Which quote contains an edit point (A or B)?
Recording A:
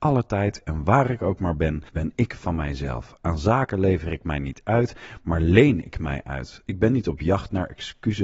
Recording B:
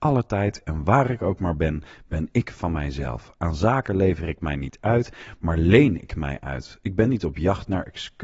A